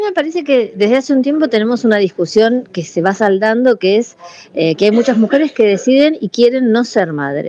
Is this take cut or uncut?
uncut